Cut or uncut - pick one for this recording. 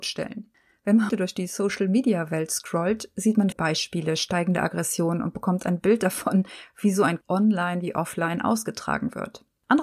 cut